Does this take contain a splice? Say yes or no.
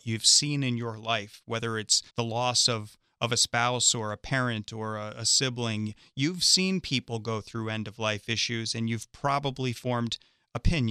yes